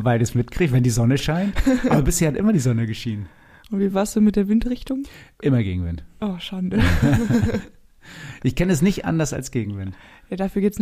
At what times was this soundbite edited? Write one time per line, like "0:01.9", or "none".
none